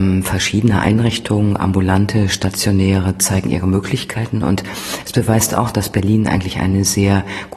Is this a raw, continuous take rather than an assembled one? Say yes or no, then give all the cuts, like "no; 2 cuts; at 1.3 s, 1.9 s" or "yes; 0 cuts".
yes; 0 cuts